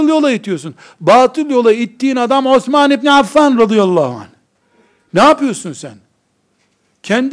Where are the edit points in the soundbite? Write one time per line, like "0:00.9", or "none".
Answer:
none